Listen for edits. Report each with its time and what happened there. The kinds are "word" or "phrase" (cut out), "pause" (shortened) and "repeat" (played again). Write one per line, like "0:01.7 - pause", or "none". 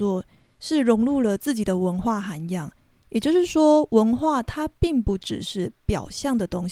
none